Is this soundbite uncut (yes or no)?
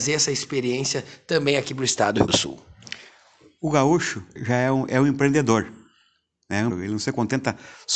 no